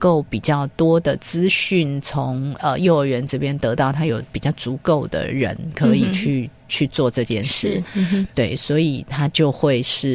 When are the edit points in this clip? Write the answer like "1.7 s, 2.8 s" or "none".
none